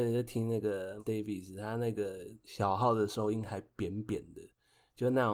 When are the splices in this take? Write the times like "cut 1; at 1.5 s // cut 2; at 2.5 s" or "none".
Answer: cut 1; at 1.0 s